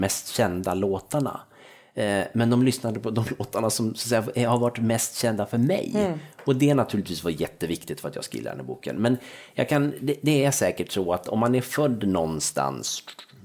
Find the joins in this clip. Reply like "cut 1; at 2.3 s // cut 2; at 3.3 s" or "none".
none